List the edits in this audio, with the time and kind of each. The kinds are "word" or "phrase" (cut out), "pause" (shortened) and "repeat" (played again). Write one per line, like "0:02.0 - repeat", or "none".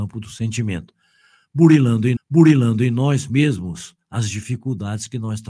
0:02.2 - repeat